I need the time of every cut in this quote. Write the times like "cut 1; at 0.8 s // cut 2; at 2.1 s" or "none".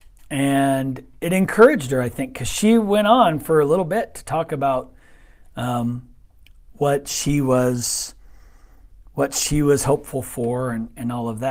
none